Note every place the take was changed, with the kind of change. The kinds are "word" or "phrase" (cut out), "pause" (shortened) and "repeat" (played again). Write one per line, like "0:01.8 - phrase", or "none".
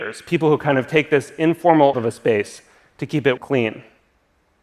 0:01.9 - word
0:03.4 - phrase